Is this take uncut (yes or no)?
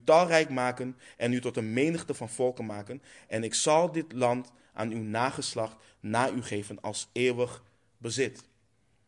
yes